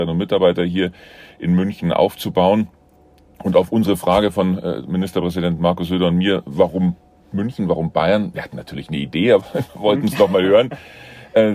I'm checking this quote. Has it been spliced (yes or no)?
no